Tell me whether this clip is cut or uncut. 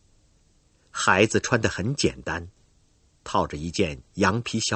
uncut